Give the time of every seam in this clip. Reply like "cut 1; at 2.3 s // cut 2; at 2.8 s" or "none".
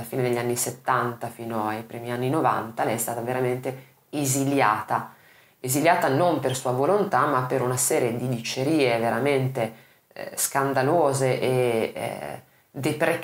none